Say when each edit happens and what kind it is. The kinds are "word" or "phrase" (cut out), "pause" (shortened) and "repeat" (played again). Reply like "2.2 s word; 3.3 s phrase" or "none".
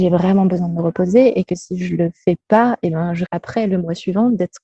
3.3 s word